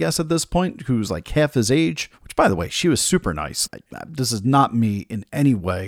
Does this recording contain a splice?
yes; 2 cuts; at 2.1 s, 3.7 s

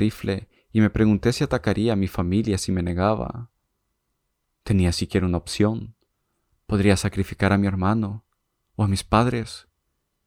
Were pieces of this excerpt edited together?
no; 0 cuts

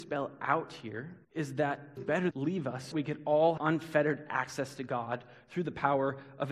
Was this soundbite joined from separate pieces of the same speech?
yes; 5 cuts; at 1.2 s, 2.0 s, 2.3 s, 2.9 s, 3.6 s

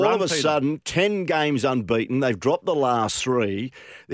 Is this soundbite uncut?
yes; 0 cuts

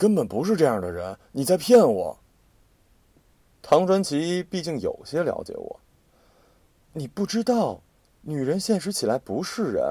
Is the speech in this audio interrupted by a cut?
no; 0 cuts

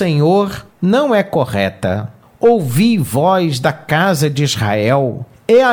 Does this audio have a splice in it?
no; 0 cuts

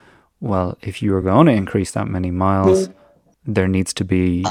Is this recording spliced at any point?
no; 0 cuts

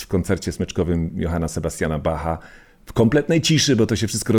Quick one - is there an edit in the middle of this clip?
no; 0 cuts

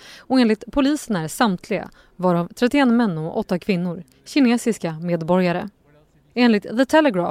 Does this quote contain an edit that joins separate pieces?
no; 0 cuts

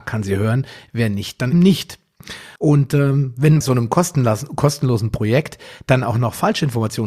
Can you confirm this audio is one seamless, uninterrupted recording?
no; 3 cuts; at 1.5 s, 2.6 s, 3.6 s

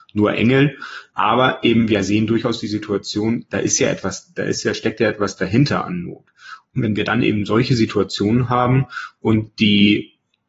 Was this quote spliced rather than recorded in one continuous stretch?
no; 0 cuts

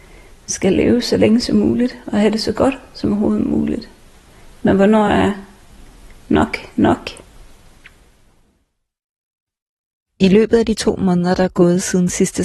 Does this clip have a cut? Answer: no; 0 cuts

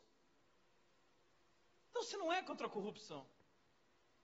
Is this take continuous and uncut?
yes; 0 cuts

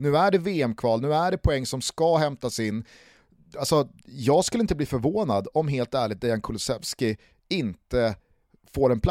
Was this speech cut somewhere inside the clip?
no; 0 cuts

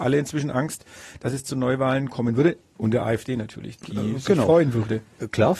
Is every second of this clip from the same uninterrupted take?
yes; 0 cuts

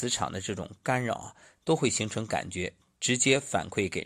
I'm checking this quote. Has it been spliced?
no; 0 cuts

